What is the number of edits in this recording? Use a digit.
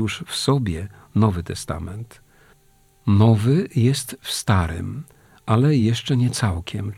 0